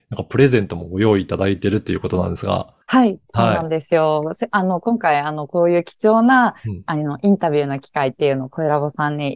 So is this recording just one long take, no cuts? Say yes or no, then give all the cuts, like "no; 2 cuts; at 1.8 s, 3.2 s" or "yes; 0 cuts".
no; 1 cut; at 2.8 s